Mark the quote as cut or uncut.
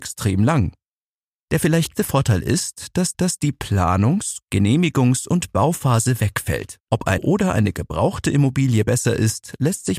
cut